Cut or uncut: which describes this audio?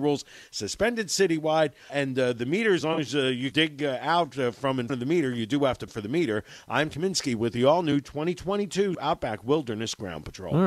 cut